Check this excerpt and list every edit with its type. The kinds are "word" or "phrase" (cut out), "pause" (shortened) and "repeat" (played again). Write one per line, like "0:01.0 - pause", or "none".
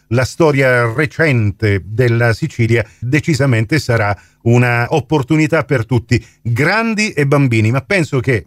0:03.0 - word